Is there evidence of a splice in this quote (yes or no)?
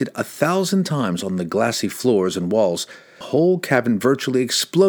yes